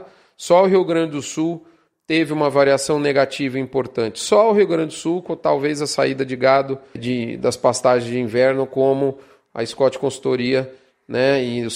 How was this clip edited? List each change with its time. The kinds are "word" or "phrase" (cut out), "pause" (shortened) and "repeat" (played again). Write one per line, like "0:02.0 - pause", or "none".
0:07.0 - word